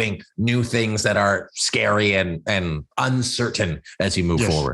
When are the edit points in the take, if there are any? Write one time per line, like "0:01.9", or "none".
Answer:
0:02.9